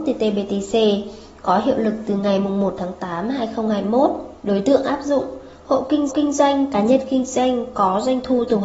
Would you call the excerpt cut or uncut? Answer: cut